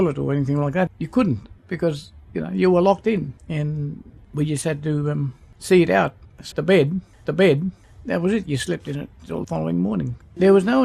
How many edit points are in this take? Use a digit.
4